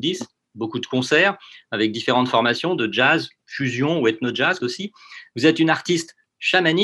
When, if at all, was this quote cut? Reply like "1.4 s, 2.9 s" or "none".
4.6 s